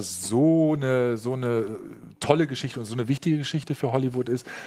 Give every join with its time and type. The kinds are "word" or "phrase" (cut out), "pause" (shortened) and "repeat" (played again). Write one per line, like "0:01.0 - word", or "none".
none